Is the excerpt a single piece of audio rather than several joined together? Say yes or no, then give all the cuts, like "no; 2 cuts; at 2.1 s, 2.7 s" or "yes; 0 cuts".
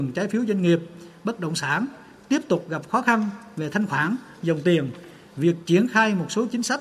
yes; 0 cuts